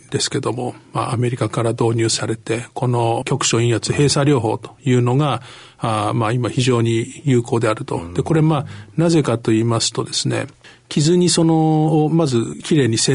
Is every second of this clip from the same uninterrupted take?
yes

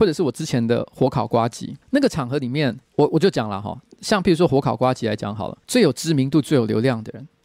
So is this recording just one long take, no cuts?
no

